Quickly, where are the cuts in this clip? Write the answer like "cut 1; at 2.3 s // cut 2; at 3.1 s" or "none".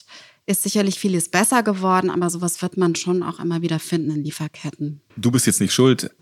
cut 1; at 5.1 s